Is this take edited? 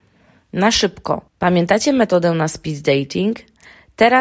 yes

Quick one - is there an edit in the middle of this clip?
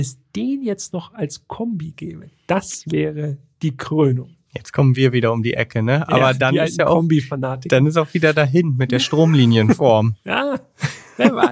no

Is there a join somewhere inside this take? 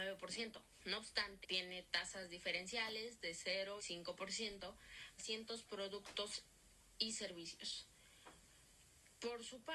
yes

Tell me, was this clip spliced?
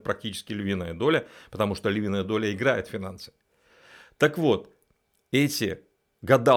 no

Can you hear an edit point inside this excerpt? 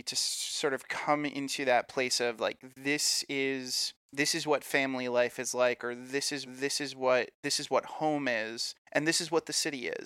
yes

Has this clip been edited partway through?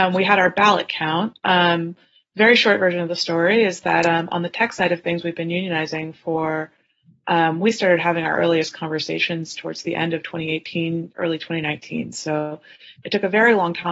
no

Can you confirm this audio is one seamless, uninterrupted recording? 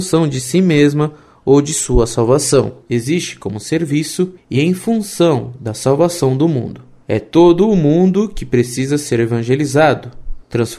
yes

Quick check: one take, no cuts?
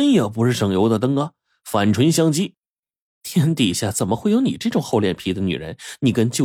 yes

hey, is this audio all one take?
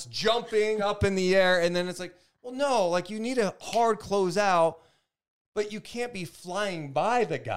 yes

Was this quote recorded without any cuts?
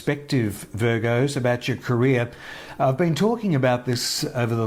yes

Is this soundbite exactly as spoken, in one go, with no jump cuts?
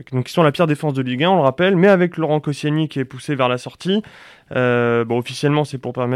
yes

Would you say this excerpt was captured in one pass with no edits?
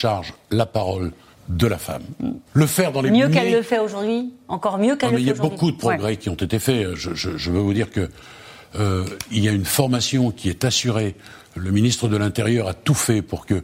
no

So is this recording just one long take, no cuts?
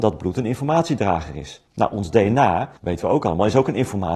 no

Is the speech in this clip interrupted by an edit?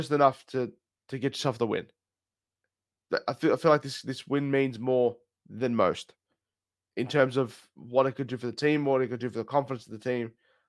no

